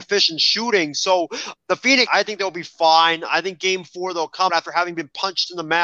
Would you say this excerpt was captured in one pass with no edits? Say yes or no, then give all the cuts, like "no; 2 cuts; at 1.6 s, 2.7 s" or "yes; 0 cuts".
no; 3 cuts; at 1.6 s, 2.1 s, 4.5 s